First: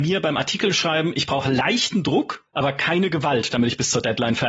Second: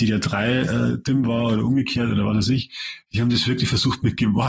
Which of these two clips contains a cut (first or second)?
first